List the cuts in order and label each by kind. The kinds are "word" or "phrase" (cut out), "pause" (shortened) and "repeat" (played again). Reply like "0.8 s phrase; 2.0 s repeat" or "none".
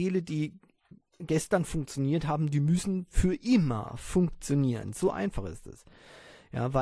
none